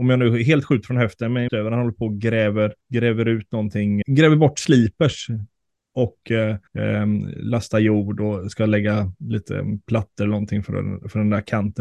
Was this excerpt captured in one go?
no; 4 cuts; at 1.5 s, 2.8 s, 4.0 s, 6.7 s

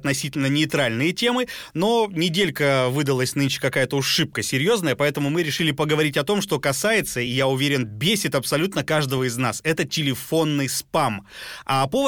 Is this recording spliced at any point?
no; 0 cuts

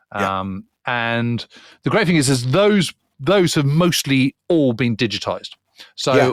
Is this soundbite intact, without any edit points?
yes; 0 cuts

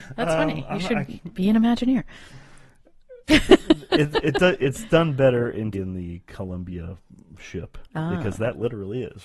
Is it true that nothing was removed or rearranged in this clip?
no; 2 cuts; at 3.2 s, 5.7 s

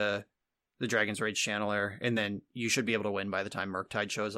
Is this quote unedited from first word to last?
yes; 0 cuts

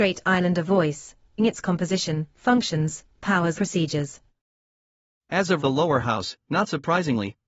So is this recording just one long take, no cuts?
no; 3 cuts; at 1.4 s, 3.6 s, 5.6 s

